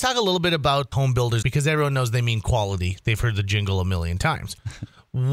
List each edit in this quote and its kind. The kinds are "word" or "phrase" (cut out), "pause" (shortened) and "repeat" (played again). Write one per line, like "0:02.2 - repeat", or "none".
0:00.9 - word
0:01.4 - word